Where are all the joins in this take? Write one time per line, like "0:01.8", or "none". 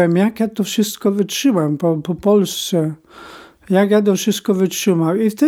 none